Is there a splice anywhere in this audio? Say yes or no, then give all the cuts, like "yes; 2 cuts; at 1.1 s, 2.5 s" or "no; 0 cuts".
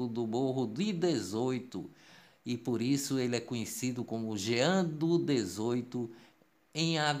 no; 0 cuts